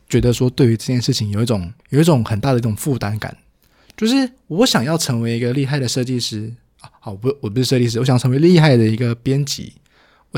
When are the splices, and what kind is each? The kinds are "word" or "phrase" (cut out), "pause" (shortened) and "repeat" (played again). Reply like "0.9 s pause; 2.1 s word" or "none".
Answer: 1.8 s pause